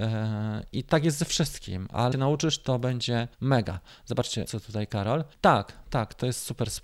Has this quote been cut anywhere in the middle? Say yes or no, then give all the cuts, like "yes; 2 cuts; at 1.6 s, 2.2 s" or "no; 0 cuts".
yes; 4 cuts; at 2.1 s, 3.3 s, 4.5 s, 5.3 s